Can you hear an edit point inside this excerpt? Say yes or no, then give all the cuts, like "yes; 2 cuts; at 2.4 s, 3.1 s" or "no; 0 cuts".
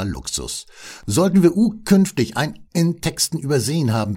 yes; 1 cut; at 2.7 s